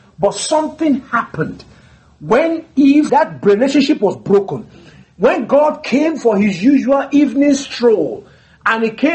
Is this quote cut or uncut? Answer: cut